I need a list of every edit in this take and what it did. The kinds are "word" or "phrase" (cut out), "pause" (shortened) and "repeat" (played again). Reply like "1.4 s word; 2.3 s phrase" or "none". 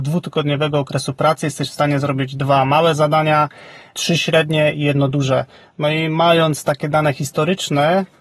none